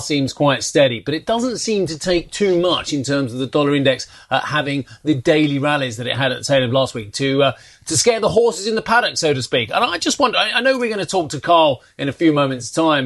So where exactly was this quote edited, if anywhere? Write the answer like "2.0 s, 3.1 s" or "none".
none